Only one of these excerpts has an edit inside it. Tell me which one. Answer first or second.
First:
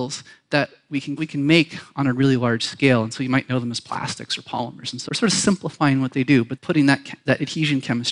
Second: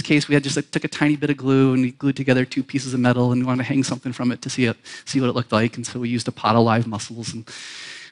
first